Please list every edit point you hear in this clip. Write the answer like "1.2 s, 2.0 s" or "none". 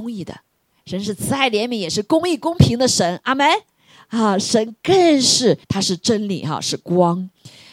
5.6 s